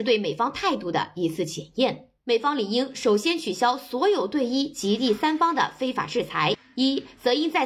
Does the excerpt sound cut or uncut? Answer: cut